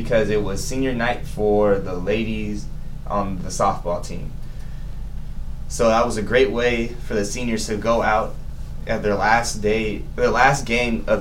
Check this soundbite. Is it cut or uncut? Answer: uncut